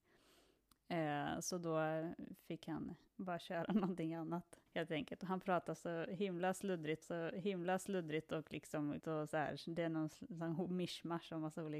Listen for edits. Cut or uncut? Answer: cut